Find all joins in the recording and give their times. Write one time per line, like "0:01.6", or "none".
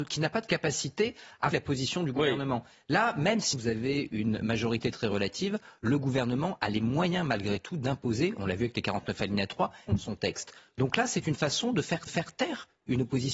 0:01.5
0:03.5
0:09.9
0:12.1